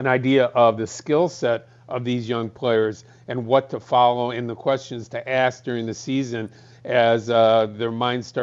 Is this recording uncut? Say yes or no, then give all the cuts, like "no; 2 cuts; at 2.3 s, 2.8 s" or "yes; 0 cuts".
yes; 0 cuts